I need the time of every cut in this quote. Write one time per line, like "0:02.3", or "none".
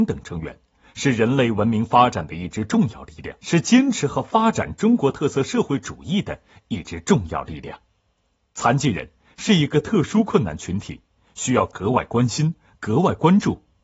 0:03.4